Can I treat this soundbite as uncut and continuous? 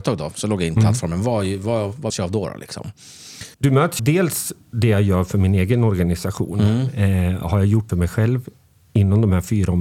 no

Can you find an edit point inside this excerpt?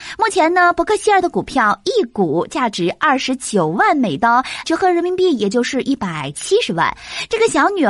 yes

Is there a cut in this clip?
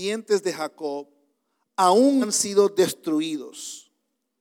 yes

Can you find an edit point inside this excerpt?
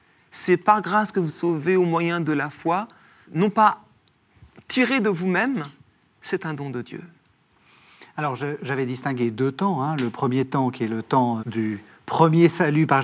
yes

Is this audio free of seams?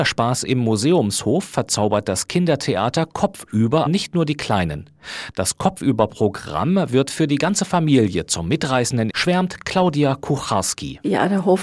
no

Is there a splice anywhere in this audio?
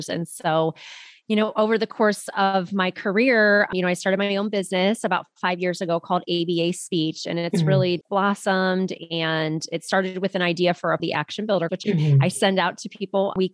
yes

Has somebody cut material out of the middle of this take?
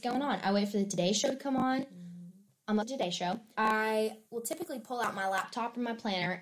yes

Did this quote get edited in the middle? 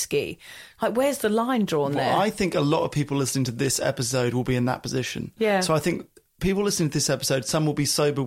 no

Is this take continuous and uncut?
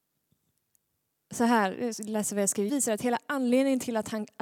no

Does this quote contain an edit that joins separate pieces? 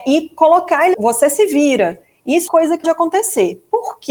yes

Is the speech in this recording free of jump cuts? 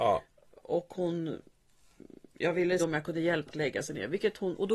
no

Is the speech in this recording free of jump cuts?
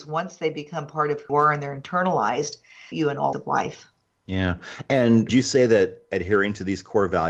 no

